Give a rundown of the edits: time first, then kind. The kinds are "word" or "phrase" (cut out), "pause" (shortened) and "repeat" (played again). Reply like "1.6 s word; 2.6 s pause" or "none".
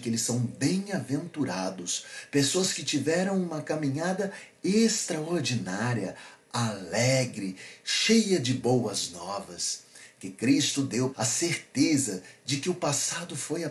11.1 s phrase